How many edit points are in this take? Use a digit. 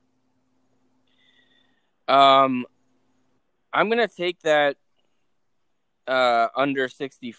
0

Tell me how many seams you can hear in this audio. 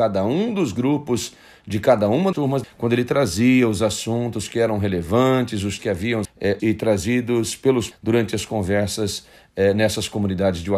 6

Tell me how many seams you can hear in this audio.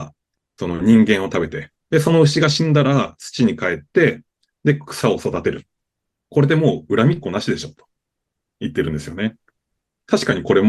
1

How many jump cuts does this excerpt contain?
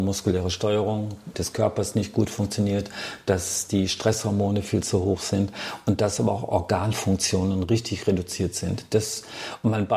1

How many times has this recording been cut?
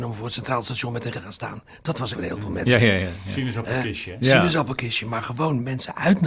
2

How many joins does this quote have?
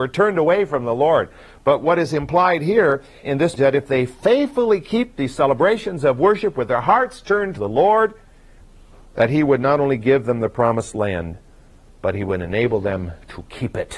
3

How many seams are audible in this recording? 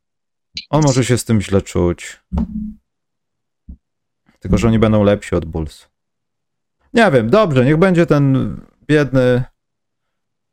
0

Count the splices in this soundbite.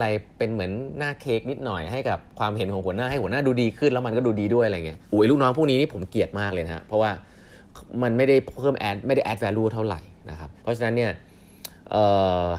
2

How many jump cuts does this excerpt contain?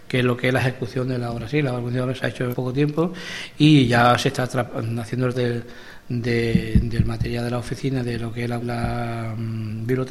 3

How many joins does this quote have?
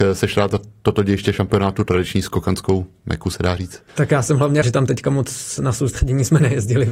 2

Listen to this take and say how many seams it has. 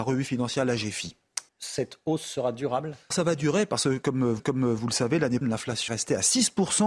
5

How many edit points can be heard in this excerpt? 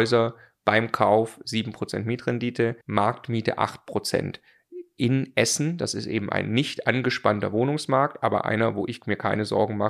1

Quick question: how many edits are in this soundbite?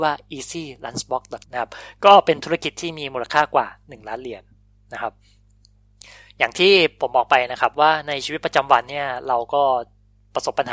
1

